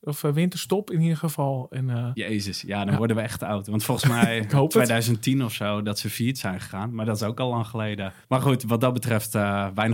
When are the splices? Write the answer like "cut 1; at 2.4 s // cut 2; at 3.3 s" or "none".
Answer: cut 1; at 8.2 s